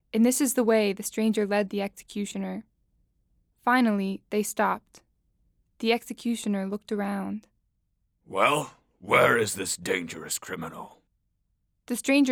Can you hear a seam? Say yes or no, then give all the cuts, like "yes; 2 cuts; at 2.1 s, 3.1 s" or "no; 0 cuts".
no; 0 cuts